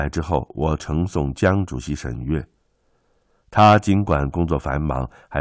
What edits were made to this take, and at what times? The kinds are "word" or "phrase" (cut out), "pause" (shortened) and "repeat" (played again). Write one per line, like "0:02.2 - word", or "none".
none